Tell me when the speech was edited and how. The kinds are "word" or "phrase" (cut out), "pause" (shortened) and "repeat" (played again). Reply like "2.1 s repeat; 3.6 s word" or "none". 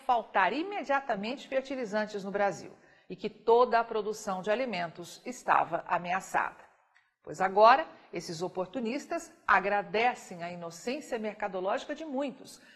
none